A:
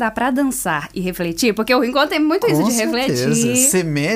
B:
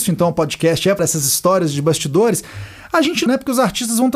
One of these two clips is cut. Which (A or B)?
B